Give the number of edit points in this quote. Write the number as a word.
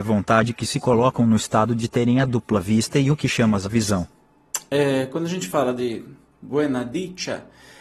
zero